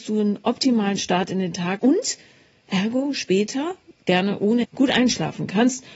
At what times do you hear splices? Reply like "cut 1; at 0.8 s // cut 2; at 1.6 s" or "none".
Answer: cut 1; at 1.8 s // cut 2; at 4.6 s